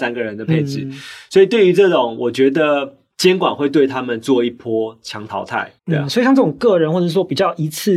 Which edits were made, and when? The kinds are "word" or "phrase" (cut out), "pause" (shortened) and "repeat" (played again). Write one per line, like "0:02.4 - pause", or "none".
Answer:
0:05.8 - pause